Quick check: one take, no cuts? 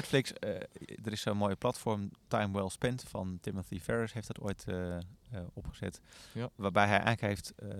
yes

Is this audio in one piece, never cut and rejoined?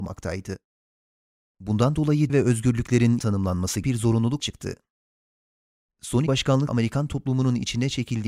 no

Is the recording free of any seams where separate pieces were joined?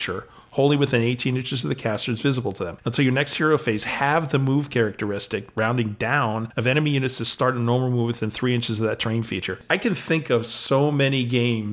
yes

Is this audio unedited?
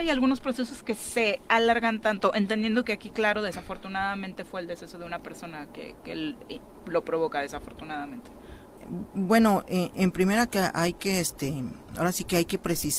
yes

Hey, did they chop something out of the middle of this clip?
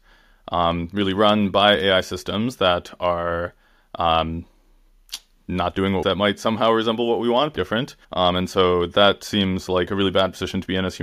yes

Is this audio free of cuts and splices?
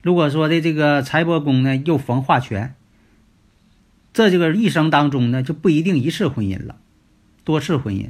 yes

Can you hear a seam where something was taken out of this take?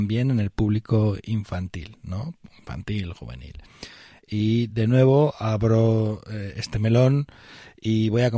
no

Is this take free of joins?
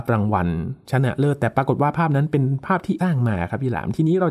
no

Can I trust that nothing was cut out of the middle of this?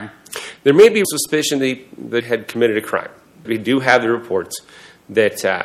no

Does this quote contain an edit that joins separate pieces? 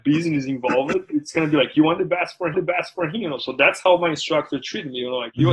yes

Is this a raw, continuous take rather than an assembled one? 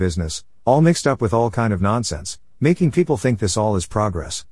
yes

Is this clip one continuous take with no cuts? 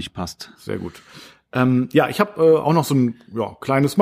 yes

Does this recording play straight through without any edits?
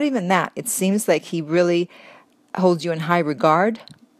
yes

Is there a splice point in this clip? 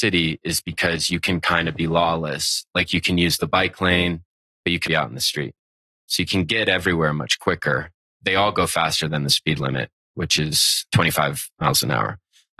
yes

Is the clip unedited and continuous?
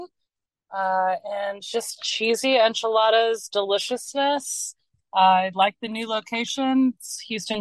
yes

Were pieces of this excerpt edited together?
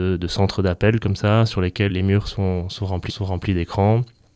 yes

